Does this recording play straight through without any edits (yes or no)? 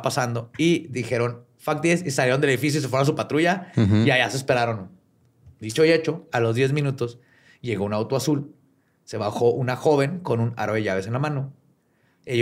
yes